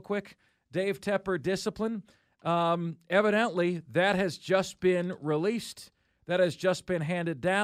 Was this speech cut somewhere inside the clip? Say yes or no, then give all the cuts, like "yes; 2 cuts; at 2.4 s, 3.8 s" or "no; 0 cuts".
no; 0 cuts